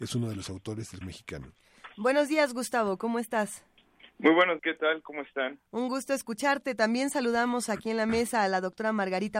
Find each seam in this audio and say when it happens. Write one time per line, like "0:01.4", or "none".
0:01.0
0:04.6